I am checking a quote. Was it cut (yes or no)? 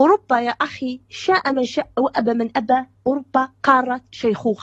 no